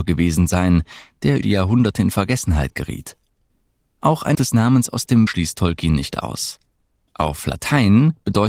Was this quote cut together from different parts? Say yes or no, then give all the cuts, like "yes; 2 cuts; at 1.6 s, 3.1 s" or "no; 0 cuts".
yes; 3 cuts; at 1.4 s, 4.3 s, 5.3 s